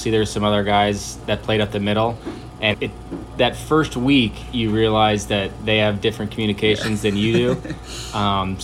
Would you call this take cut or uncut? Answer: cut